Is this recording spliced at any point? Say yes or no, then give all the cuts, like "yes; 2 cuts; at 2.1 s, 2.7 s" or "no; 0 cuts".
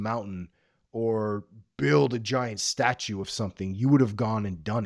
no; 0 cuts